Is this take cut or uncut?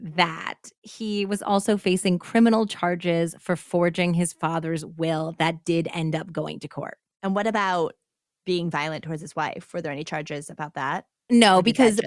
uncut